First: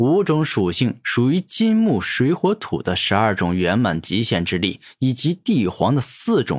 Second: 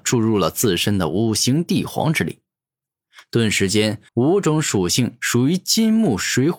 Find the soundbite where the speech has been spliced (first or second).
second